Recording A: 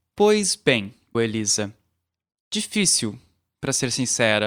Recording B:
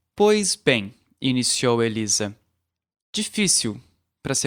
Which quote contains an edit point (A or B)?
A